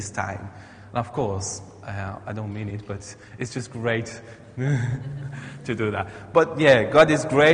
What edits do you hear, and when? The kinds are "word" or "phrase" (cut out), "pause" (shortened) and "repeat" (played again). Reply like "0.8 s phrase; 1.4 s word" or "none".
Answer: none